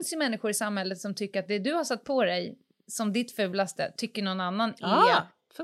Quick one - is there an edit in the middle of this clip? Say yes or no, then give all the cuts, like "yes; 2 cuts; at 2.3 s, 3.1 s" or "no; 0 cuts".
no; 0 cuts